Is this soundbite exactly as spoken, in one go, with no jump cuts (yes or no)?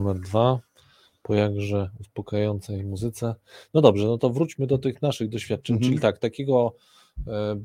yes